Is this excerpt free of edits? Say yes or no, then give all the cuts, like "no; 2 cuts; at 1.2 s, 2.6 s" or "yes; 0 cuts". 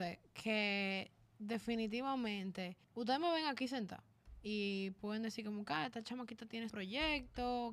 no; 2 cuts; at 2.8 s, 6.7 s